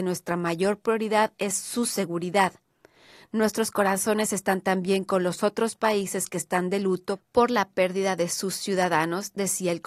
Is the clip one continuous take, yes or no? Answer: yes